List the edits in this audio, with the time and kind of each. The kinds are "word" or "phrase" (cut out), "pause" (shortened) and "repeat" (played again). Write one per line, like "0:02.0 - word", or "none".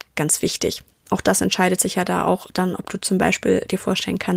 none